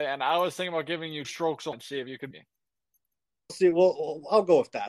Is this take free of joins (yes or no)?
no